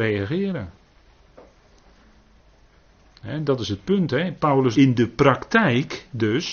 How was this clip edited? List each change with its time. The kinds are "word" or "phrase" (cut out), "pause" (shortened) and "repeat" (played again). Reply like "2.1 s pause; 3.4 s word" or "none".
4.7 s word